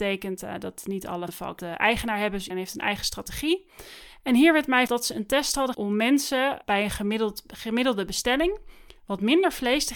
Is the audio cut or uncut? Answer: cut